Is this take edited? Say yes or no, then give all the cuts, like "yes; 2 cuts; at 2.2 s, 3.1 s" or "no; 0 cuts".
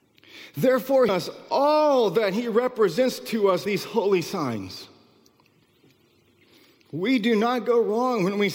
yes; 2 cuts; at 1.1 s, 3.7 s